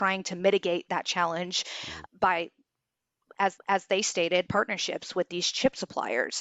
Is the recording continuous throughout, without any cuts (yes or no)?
no